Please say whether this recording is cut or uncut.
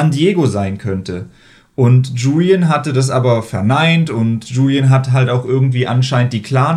uncut